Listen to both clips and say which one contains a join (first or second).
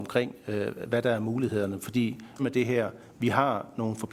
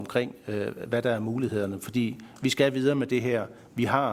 first